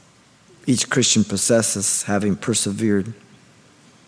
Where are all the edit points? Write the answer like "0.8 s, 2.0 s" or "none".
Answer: none